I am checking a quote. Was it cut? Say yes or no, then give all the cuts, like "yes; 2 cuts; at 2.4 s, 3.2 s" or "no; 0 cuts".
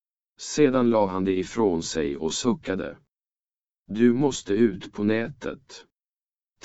no; 0 cuts